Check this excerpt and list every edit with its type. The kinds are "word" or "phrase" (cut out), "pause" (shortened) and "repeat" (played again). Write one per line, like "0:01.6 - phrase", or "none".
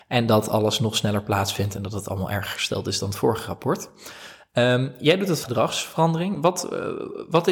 0:05.4 - word

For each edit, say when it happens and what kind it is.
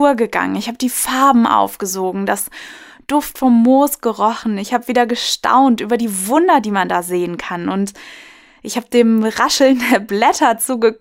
none

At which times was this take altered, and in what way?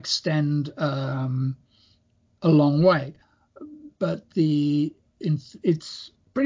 none

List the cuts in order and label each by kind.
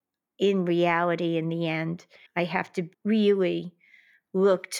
0:02.3 - pause
0:02.9 - pause

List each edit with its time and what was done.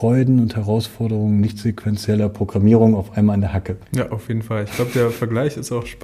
0:03.8 - pause

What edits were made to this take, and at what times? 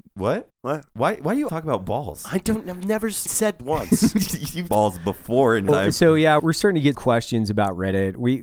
0:01.5 - word
0:03.3 - word
0:03.6 - word
0:04.7 - word
0:05.7 - word
0:06.4 - word
0:06.9 - word

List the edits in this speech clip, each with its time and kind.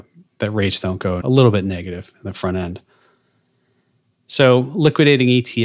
0:01.2 - word

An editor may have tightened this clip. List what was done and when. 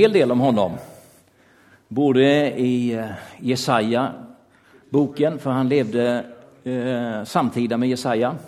none

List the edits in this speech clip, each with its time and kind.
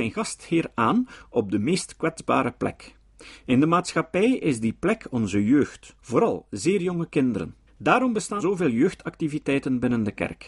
0:06.0 - pause
0:07.7 - pause
0:08.4 - word

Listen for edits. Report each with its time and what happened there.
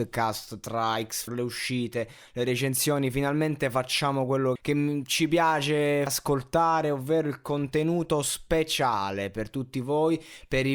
0:01.3 - word
0:04.6 - word
0:06.1 - word

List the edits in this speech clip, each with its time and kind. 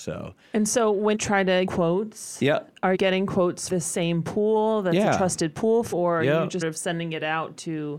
0:01.1 - word
0:01.7 - word
0:02.9 - word
0:03.7 - word
0:05.9 - word
0:06.6 - word

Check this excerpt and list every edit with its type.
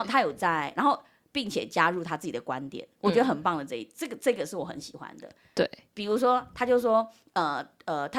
none

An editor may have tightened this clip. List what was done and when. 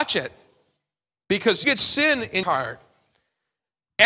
0:01.6 - word
0:02.4 - word

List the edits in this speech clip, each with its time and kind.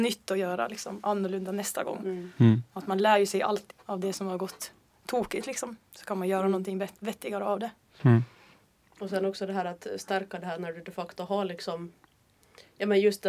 0:03.7 - word

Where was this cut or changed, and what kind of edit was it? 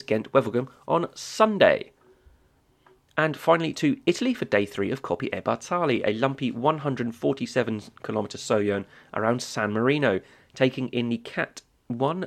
none

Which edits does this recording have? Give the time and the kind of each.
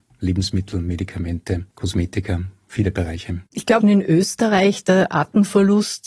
0:03.5 - pause
0:03.8 - phrase

